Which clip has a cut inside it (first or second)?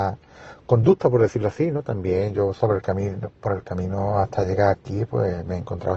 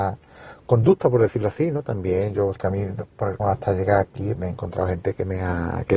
second